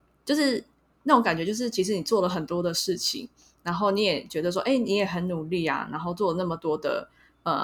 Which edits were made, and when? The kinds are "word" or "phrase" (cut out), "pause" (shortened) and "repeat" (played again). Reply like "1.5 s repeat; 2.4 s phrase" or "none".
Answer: none